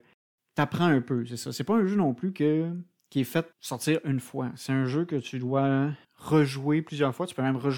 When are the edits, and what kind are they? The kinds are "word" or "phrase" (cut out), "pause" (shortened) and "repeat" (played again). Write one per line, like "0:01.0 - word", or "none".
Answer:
0:03.5 - word
0:06.0 - pause